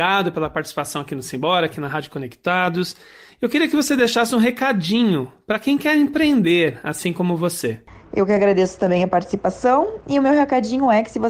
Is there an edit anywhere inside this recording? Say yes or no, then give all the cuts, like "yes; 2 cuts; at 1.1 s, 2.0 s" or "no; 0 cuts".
no; 0 cuts